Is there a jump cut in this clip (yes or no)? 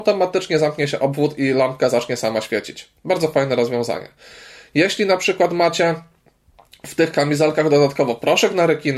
no